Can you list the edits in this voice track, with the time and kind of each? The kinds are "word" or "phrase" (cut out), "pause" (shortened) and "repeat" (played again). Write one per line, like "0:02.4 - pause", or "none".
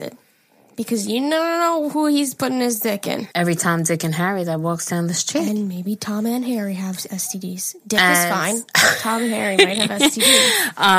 0:03.3 - pause